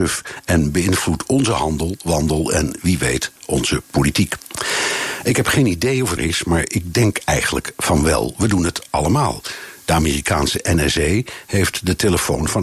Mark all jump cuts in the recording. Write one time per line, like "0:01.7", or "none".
0:06.2